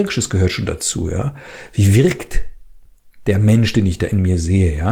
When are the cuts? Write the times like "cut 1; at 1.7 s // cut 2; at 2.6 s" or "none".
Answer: none